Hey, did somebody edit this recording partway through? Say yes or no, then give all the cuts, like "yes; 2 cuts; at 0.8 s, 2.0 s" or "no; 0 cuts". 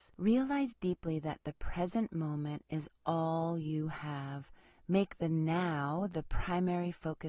no; 0 cuts